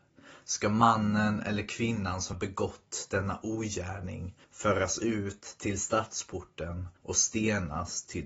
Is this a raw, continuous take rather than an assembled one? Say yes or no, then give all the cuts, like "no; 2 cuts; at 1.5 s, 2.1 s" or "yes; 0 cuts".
no; 3 cuts; at 2.3 s, 4.4 s, 7.0 s